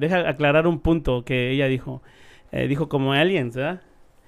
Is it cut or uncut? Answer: uncut